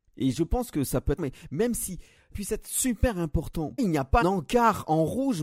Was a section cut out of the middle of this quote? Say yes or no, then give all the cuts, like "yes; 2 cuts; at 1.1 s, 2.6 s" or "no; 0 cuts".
yes; 4 cuts; at 1.2 s, 2.3 s, 3.8 s, 4.2 s